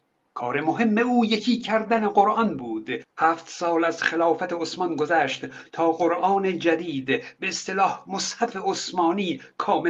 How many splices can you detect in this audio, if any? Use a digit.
0